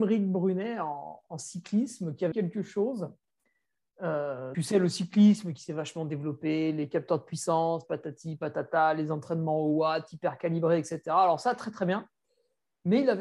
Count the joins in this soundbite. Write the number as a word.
two